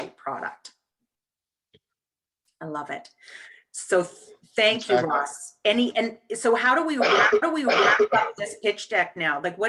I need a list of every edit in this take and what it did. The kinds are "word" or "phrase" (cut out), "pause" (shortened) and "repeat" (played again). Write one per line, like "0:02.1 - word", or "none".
0:07.4 - repeat